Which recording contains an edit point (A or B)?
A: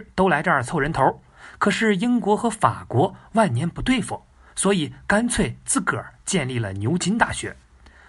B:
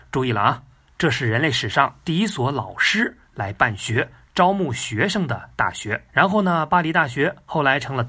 B